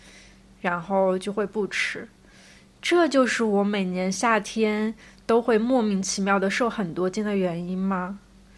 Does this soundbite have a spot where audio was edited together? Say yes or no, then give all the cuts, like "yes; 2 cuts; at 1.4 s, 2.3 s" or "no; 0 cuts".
no; 0 cuts